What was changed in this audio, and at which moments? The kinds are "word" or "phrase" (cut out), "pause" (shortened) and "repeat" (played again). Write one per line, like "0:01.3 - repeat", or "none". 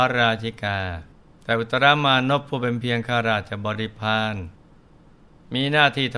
0:01.1 - pause